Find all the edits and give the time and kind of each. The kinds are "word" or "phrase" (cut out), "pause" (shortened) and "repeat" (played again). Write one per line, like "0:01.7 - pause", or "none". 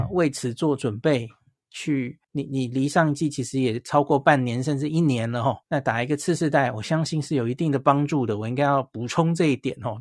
0:02.2 - pause
0:05.6 - pause